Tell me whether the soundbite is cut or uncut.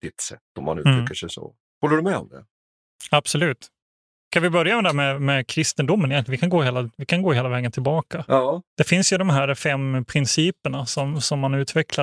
cut